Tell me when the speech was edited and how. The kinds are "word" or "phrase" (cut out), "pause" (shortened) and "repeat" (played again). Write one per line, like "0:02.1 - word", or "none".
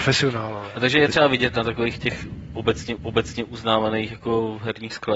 0:03.0 - repeat